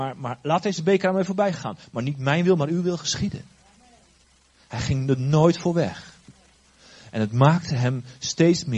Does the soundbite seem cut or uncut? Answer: uncut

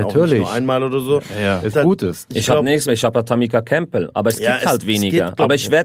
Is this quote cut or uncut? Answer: cut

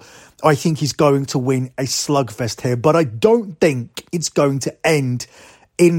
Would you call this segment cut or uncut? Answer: cut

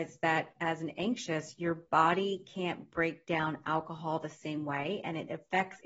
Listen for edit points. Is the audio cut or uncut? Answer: uncut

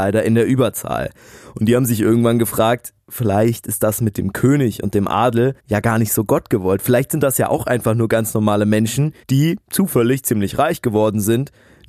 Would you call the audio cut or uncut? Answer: cut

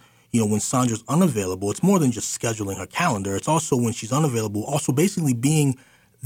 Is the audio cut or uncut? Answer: uncut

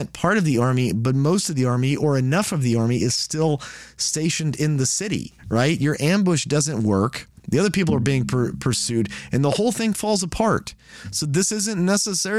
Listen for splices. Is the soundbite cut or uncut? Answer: cut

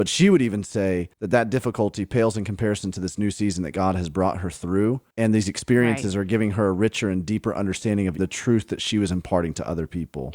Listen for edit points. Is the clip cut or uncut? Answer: cut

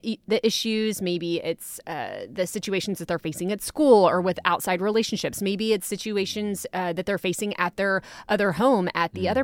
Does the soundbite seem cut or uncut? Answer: uncut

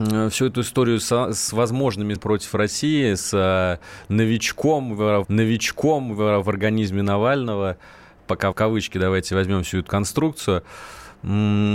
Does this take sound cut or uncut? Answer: cut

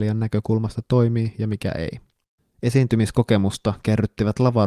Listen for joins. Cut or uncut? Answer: cut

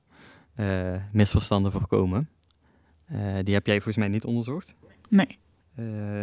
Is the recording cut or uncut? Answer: uncut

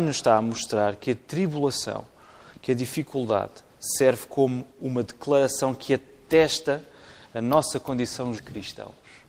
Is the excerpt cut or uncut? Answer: cut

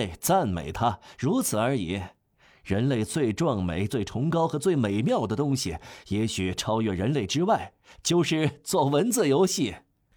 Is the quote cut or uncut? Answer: uncut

